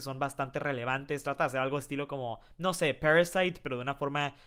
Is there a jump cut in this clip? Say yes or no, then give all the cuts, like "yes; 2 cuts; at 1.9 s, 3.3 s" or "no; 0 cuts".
no; 0 cuts